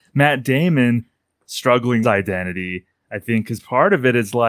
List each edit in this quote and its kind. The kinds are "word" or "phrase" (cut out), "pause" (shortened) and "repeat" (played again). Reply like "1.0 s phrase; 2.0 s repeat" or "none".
2.0 s phrase